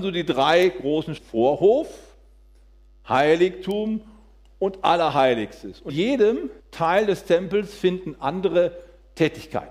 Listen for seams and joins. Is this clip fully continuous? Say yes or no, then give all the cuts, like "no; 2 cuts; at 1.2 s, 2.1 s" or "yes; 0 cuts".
no; 3 cuts; at 1.2 s, 5.9 s, 6.6 s